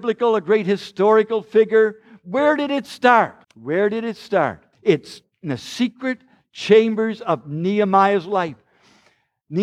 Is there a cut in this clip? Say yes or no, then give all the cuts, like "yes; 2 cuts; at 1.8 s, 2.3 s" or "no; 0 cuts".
yes; 2 cuts; at 3.4 s, 4.7 s